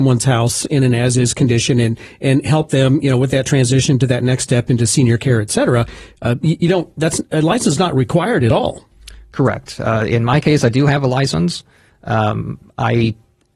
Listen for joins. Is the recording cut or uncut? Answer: uncut